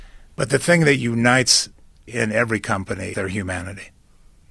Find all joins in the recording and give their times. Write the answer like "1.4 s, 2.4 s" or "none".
2.1 s, 3.1 s